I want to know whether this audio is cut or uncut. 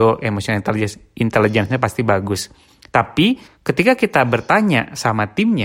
cut